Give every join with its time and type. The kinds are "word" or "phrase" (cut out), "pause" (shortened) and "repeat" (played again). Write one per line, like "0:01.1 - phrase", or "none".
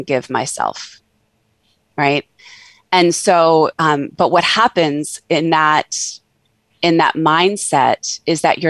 none